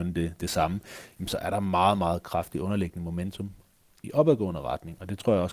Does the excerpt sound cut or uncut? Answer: uncut